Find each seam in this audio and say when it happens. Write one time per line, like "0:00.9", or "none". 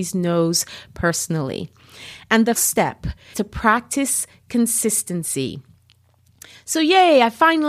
0:02.6
0:03.3